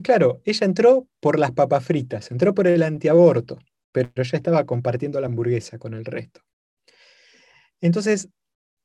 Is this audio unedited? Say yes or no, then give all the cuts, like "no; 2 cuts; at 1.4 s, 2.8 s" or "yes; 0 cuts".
yes; 0 cuts